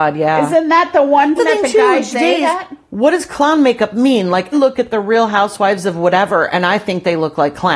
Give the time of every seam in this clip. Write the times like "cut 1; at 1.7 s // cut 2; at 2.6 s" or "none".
cut 1; at 1.4 s // cut 2; at 2.1 s // cut 3; at 4.5 s